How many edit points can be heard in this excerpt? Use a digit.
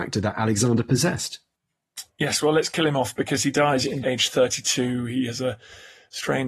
1